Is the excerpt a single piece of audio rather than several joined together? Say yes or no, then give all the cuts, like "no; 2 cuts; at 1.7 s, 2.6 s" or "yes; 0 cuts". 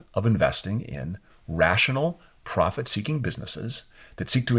yes; 0 cuts